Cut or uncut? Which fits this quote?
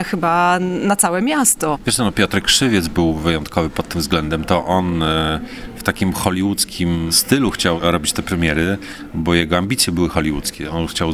uncut